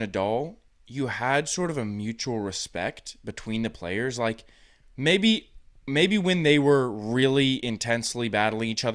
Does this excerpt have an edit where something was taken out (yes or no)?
no